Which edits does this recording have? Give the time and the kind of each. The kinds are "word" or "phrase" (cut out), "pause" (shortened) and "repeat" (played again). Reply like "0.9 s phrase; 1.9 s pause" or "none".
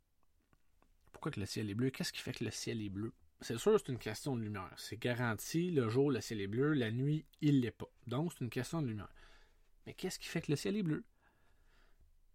none